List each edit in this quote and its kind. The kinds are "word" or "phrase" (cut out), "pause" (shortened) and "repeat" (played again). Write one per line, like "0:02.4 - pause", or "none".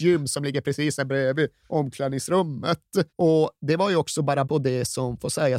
0:03.1 - pause
0:04.4 - word